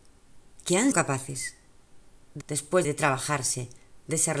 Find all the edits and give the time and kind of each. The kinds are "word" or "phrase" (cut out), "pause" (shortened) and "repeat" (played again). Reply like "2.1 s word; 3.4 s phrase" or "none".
0.9 s word; 2.4 s word; 2.8 s word